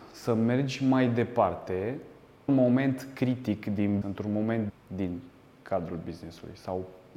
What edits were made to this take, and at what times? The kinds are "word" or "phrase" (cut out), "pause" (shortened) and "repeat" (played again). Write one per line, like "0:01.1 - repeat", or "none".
0:02.5 - word
0:04.0 - word
0:04.7 - word